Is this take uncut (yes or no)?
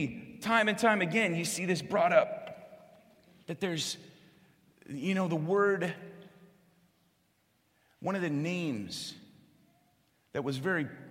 yes